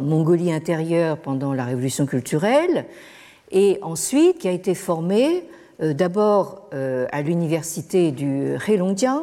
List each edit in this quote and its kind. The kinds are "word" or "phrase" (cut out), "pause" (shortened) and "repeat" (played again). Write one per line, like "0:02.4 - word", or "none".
none